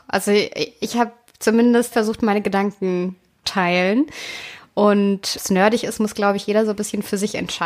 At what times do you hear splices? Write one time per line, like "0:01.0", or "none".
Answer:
0:01.9
0:03.4
0:05.3

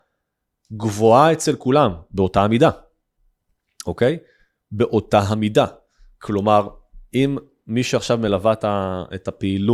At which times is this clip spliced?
none

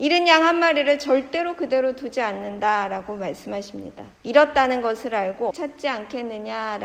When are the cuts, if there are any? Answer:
0:04.1
0:05.5

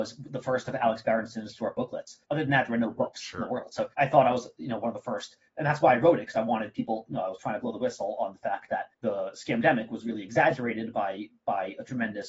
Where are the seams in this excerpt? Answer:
0:02.2
0:03.9
0:08.9

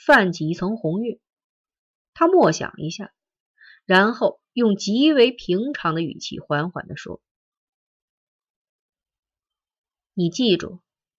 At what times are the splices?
none

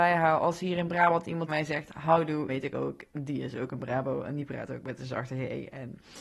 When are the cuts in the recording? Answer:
0:01.5
0:02.5

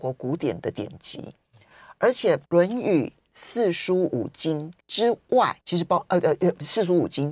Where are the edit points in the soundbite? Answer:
0:02.5
0:04.8
0:05.6

